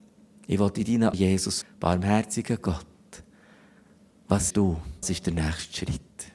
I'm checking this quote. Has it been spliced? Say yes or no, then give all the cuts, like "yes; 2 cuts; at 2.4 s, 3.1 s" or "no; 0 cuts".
yes; 4 cuts; at 1.1 s, 1.6 s, 4.5 s, 5.0 s